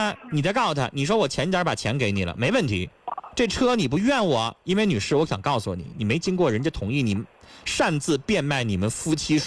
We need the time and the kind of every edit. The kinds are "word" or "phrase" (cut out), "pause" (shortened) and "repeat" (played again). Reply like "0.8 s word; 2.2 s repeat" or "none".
none